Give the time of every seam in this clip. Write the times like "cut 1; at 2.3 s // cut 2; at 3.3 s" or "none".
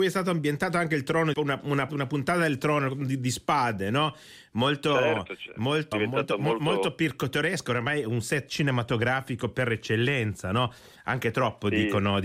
cut 1; at 1.3 s // cut 2; at 1.9 s // cut 3; at 5.9 s